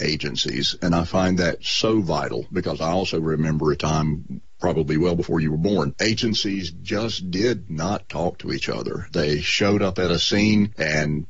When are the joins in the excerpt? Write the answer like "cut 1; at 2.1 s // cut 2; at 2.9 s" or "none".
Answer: cut 1; at 6.0 s

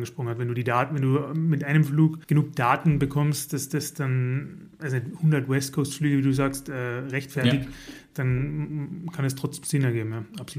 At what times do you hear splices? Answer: cut 1; at 2.2 s

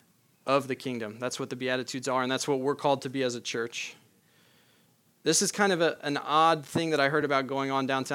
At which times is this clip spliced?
none

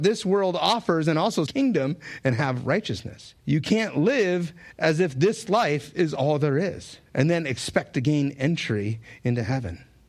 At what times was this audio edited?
cut 1; at 1.5 s // cut 2; at 3.4 s // cut 3; at 7.1 s

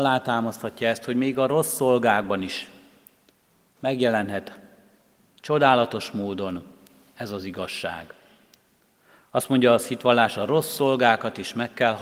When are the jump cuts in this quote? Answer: none

